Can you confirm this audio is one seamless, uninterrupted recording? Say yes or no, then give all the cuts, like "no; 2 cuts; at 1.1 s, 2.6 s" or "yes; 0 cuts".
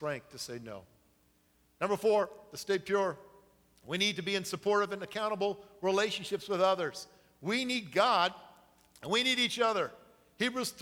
yes; 0 cuts